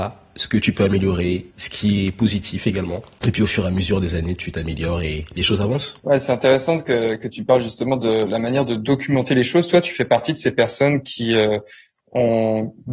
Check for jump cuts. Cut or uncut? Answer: cut